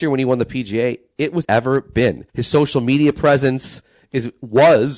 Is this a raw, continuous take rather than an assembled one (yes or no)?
no